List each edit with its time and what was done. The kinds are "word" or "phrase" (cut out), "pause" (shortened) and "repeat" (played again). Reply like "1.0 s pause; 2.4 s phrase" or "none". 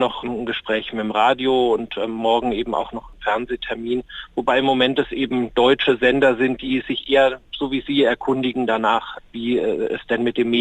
none